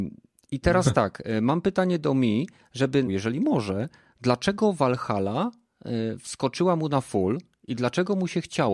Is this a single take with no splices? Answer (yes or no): no